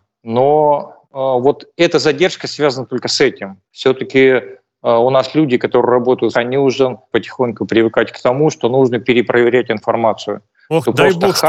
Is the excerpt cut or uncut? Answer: cut